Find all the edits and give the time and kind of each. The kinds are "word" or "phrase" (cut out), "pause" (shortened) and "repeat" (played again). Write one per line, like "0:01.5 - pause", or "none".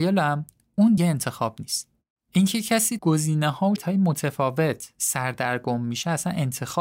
0:01.0 - word
0:03.0 - word
0:03.8 - word